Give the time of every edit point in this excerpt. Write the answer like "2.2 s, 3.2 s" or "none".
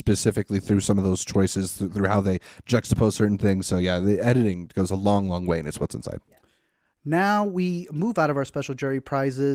none